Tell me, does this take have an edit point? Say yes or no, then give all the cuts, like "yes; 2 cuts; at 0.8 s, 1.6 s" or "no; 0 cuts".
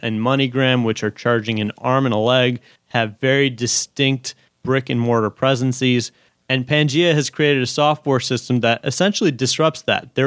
no; 0 cuts